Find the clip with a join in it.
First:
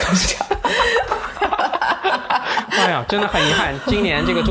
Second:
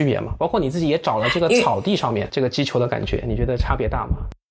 second; 1 cut; at 2.3 s

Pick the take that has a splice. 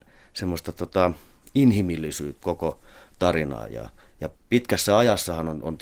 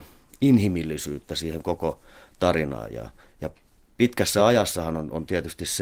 first; 2 cuts; at 2.4 s, 4.4 s

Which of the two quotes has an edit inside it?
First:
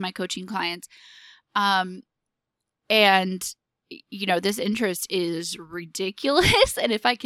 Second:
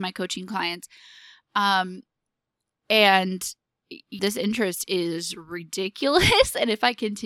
second; 1 cut; at 4.2 s

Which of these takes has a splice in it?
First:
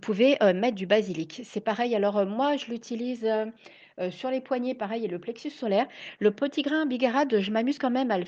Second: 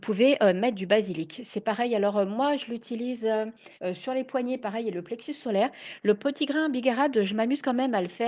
second; 1 cut; at 3.8 s

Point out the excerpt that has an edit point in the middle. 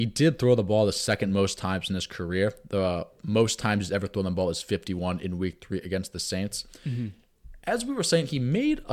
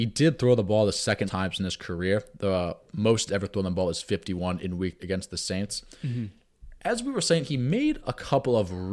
second; 3 cuts; at 1.3 s, 3.3 s, 5.0 s

